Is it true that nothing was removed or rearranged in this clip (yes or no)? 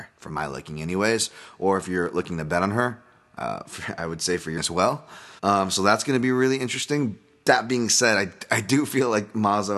no